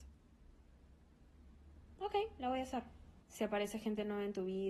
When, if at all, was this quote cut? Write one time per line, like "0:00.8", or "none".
0:03.2